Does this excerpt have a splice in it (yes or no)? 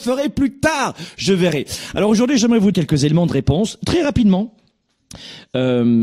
yes